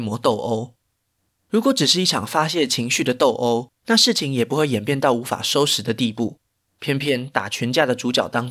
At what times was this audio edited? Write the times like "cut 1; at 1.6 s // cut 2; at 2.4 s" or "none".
cut 1; at 1.0 s // cut 2; at 3.7 s // cut 3; at 6.6 s